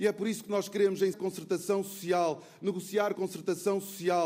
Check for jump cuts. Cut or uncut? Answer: cut